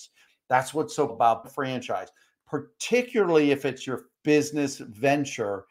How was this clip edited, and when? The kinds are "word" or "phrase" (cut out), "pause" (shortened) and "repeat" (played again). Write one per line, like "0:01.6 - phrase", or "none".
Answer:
0:01.1 - word
0:01.4 - word
0:04.1 - word